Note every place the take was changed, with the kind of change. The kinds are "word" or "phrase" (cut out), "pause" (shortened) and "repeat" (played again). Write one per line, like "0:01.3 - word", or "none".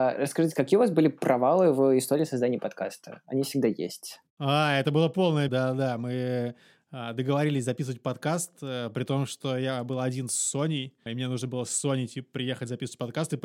0:05.5 - word
0:11.1 - word